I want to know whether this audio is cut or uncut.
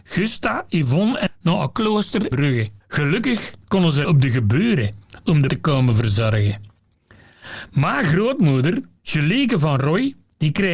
cut